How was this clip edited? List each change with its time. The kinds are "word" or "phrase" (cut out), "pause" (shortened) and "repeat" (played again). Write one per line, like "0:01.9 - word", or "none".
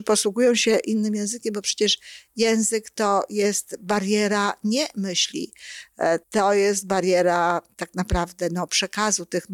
0:06.2 - pause